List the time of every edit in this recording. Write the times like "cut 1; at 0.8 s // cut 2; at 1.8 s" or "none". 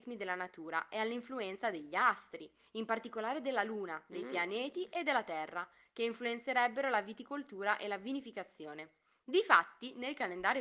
none